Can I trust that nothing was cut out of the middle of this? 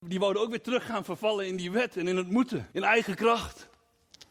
no; 1 cut; at 2.7 s

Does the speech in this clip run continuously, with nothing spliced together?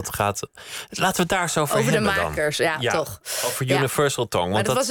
yes; 0 cuts

